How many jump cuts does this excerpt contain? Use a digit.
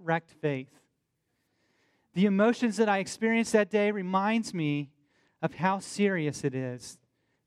0